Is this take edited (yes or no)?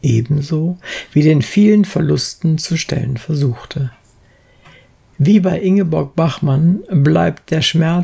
no